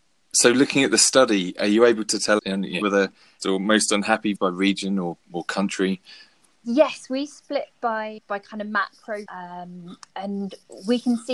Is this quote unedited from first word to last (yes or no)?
no